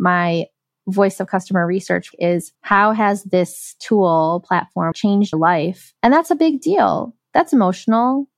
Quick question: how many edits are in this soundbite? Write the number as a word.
five